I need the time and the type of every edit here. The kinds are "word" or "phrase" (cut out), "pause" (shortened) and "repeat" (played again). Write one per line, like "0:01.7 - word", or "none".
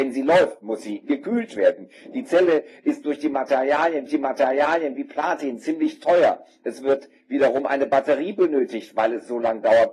0:04.1 - repeat